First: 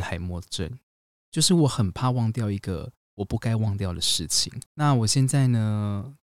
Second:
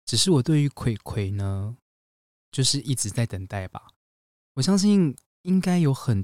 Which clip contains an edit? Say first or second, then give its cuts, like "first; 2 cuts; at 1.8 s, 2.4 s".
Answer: first; 1 cut; at 4.7 s